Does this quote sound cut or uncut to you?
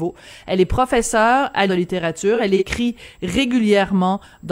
cut